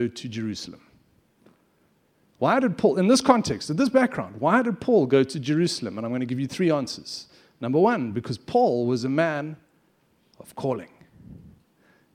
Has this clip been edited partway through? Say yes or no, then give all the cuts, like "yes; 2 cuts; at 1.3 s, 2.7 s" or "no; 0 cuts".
no; 0 cuts